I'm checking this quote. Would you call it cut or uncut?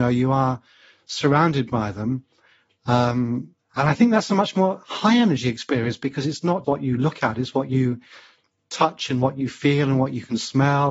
cut